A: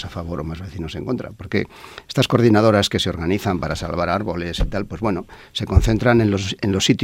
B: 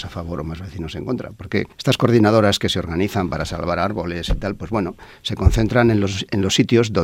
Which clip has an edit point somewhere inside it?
B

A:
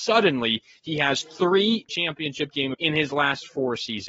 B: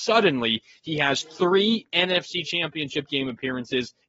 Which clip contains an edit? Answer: A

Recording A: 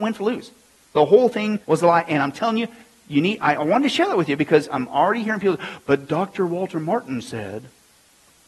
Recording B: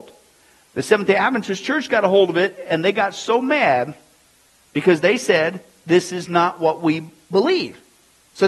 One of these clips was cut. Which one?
A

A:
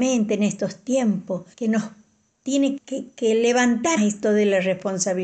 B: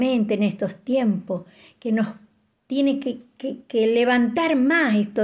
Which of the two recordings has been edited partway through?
A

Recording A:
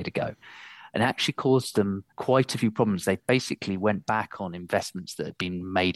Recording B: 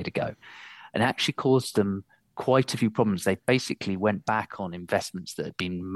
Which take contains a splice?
A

